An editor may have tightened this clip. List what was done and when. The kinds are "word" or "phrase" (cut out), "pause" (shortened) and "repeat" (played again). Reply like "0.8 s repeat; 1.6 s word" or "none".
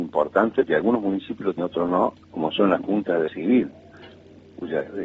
1.6 s word; 2.2 s pause; 3.3 s word